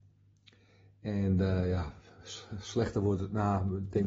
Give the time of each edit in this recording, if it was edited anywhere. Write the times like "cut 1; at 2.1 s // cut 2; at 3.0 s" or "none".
none